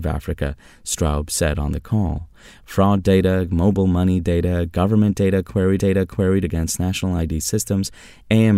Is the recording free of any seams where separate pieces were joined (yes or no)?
no